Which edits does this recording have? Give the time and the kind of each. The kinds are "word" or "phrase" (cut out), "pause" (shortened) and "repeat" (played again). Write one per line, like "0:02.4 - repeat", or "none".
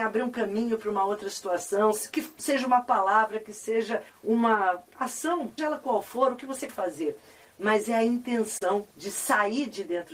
0:04.1 - pause
0:05.6 - word
0:06.7 - word
0:08.9 - pause

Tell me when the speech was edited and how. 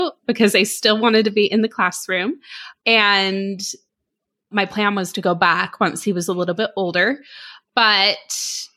none

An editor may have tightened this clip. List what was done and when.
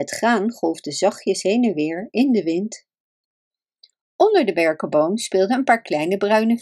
none

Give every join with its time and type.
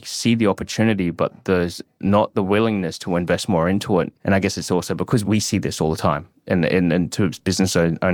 0:04.2 - pause
0:05.2 - word

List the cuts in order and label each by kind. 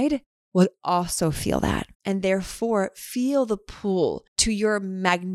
0:01.9 - pause
0:04.3 - pause

